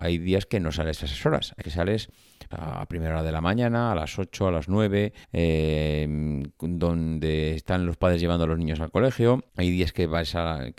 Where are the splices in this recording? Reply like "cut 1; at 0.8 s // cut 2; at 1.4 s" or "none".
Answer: cut 1; at 1.6 s // cut 2; at 2.5 s // cut 3; at 5.2 s // cut 4; at 9.5 s